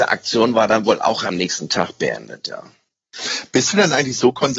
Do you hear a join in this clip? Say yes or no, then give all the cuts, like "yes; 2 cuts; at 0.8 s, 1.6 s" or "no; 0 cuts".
no; 0 cuts